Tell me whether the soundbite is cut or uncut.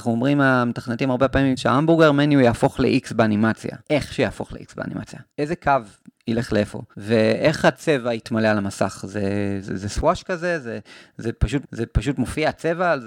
cut